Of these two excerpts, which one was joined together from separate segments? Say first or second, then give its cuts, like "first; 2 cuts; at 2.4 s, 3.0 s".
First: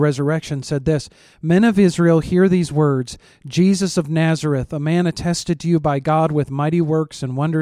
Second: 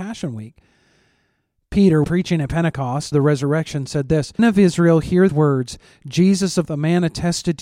second; 5 cuts; at 2.0 s, 3.1 s, 4.4 s, 5.3 s, 6.6 s